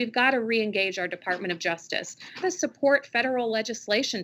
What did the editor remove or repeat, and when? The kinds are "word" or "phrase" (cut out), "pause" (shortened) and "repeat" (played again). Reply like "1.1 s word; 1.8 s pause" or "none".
2.4 s phrase